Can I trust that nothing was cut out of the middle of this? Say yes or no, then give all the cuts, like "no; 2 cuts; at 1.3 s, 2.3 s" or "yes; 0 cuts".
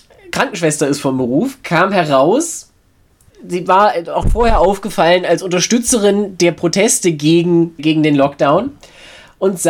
no; 3 cuts; at 3.3 s, 4.2 s, 7.8 s